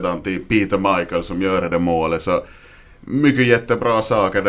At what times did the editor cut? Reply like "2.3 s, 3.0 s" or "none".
none